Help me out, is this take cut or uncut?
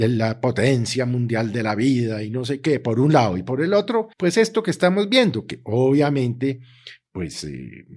cut